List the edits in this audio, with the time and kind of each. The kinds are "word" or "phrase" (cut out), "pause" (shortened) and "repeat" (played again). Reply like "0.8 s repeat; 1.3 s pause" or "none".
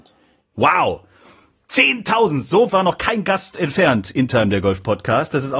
2.7 s word; 4.3 s word

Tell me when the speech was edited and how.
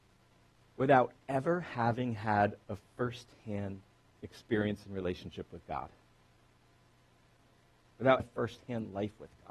8.2 s phrase

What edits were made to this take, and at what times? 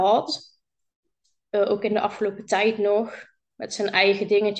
none

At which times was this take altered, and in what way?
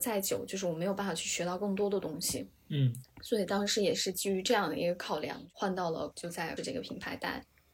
6.1 s word; 6.6 s word

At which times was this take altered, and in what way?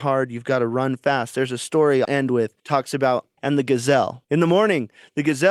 2.0 s word; 2.6 s pause; 3.4 s phrase; 4.2 s pause

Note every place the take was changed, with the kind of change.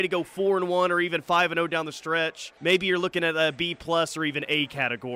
2.6 s pause

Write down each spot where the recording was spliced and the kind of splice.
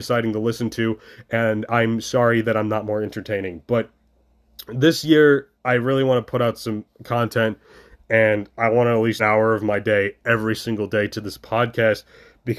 5.5 s pause; 9.2 s phrase

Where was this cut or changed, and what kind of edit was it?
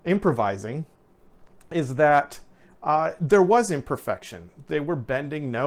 none

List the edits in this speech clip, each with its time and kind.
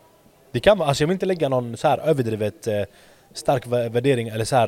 none

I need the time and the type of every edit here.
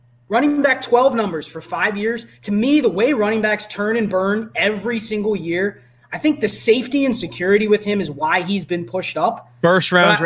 none

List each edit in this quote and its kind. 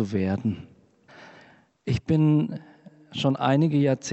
1.1 s pause

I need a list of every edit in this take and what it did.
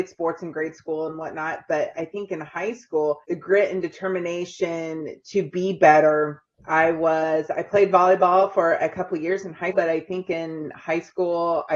3.2 s pause; 6.5 s pause; 9.7 s word

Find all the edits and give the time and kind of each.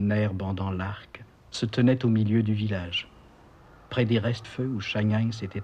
4.4 s word

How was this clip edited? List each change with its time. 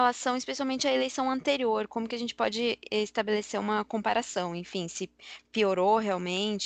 none

